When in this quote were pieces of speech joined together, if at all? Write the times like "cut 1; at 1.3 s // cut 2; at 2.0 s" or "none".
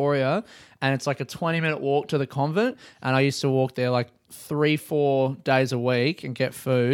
none